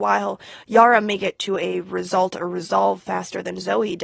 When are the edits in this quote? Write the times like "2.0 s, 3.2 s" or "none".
none